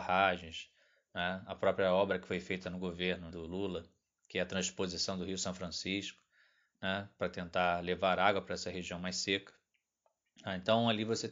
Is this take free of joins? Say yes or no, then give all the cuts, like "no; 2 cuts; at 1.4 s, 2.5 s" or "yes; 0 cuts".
no; 1 cut; at 3.3 s